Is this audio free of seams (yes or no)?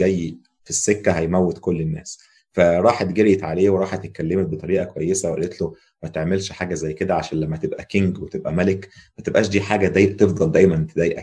yes